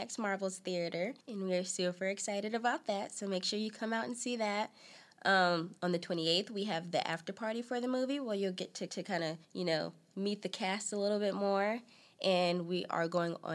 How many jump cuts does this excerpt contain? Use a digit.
4